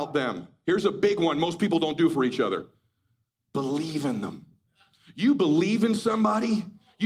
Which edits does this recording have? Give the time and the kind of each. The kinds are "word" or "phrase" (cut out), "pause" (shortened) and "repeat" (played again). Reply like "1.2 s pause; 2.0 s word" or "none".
none